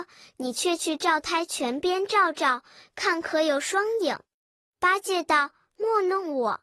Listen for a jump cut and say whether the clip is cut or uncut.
uncut